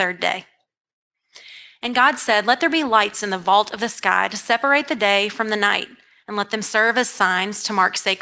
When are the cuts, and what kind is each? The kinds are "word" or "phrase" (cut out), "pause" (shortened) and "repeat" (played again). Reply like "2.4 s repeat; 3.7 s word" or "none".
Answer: none